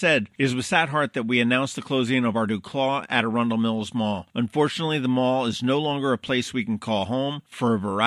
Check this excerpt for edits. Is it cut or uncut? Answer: uncut